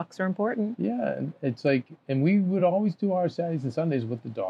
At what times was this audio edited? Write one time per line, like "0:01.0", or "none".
none